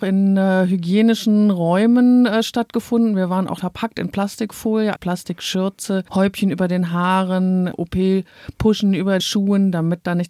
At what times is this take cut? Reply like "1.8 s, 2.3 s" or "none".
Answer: 3.6 s, 5.0 s, 9.2 s